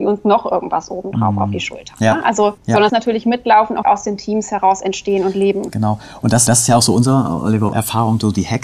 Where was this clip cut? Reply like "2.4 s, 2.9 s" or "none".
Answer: 2.6 s, 2.9 s, 3.8 s, 6.5 s, 7.7 s